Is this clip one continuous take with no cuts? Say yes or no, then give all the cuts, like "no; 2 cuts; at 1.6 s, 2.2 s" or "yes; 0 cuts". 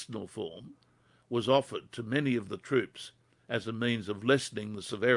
yes; 0 cuts